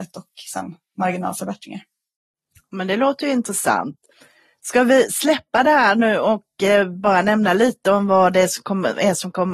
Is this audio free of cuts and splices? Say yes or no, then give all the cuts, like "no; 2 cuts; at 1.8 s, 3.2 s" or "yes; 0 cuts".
yes; 0 cuts